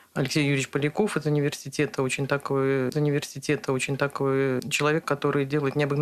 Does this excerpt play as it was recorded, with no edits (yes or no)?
no